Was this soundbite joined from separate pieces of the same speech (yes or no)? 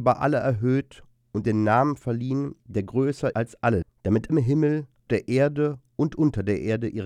yes